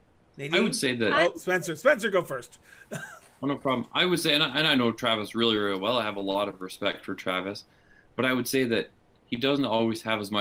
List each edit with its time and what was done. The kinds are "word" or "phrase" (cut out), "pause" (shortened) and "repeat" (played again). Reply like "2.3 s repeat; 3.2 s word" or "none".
none